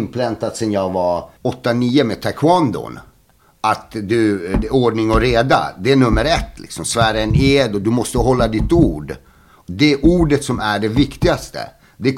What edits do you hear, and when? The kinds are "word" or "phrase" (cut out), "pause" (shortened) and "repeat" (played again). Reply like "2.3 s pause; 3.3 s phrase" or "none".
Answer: 1.4 s pause